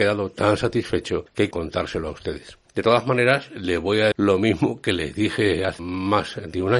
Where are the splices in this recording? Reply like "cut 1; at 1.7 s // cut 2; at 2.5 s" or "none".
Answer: cut 1; at 1.5 s // cut 2; at 4.1 s // cut 3; at 5.8 s